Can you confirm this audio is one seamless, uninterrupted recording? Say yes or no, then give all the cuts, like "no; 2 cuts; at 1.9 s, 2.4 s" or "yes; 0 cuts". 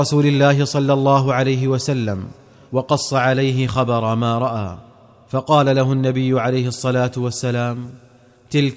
yes; 0 cuts